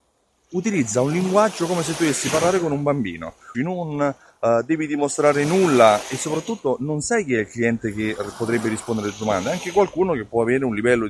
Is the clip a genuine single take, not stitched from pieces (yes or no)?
no